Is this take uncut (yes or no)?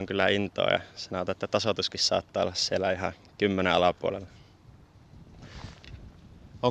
yes